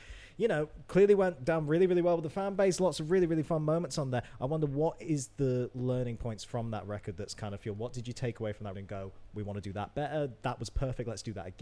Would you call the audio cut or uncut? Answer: cut